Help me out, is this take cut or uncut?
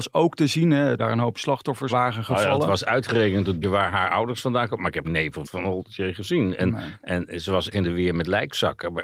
cut